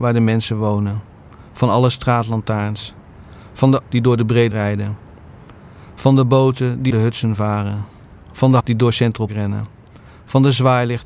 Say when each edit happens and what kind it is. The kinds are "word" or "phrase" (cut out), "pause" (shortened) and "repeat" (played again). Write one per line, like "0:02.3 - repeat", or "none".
0:03.8 - word
0:04.5 - word
0:06.9 - word
0:08.6 - word
0:09.3 - word